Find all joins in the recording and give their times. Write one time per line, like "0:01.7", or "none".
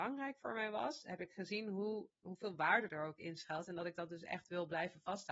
0:02.1